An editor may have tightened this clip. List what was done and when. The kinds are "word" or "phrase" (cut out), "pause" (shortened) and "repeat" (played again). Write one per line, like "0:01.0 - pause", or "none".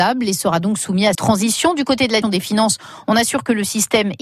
0:01.1 - word
0:02.2 - word